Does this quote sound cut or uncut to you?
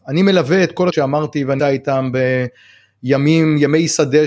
cut